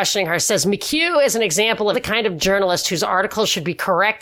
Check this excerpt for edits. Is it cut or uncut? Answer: cut